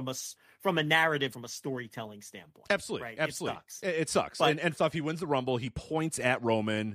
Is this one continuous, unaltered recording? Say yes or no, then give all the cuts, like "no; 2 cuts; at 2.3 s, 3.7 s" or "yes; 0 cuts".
no; 2 cuts; at 1.3 s, 4.8 s